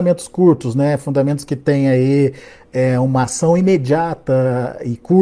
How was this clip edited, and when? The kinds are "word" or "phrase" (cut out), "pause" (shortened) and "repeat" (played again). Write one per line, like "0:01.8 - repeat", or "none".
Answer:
none

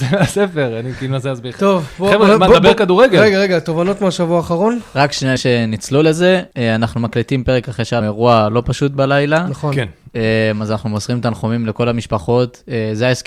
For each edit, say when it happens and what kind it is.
0:05.4 - word
0:06.5 - pause
0:08.0 - word

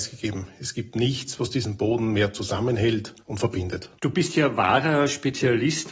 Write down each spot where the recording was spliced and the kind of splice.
0:03.2 - pause
0:04.0 - pause

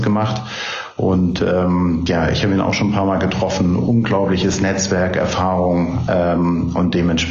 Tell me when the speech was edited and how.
none

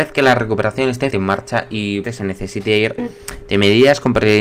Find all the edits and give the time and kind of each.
0:01.1 - word
0:02.0 - word
0:03.0 - word

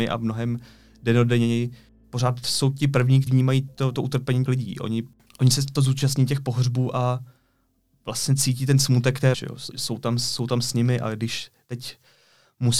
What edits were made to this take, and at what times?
0:03.3 - word
0:03.9 - word
0:04.5 - word
0:05.7 - word
0:09.3 - word
0:09.7 - word

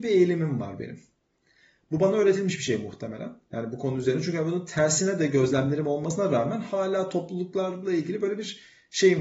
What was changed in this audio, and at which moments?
none

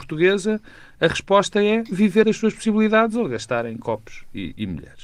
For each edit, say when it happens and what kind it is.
0:02.2 - word

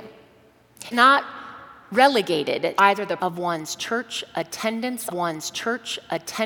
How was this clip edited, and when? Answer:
0:00.9 - word
0:02.8 - word
0:03.2 - word
0:05.1 - repeat

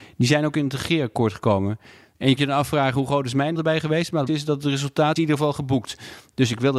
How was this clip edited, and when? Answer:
0:02.4 - word
0:03.5 - word
0:04.3 - word
0:05.2 - word

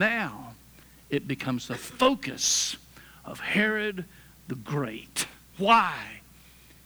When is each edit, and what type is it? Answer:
none

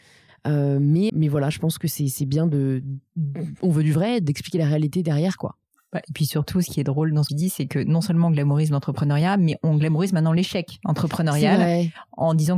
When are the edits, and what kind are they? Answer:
0:01.1 - word
0:07.3 - word

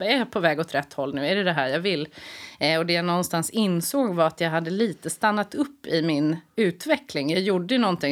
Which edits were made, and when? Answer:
none

